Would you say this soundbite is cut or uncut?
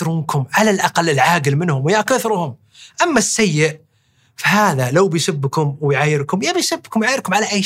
uncut